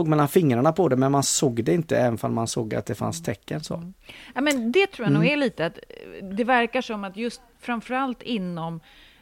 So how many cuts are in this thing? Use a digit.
0